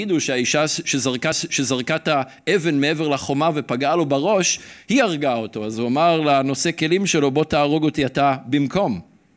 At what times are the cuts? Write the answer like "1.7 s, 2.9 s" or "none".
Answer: 1.3 s